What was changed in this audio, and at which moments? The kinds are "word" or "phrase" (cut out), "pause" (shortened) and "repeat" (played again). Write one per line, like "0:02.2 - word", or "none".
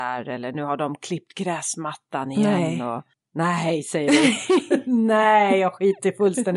0:03.1 - pause